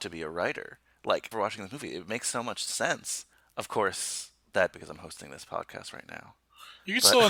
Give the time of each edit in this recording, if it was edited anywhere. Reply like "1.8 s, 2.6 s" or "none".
1.3 s, 3.3 s, 4.7 s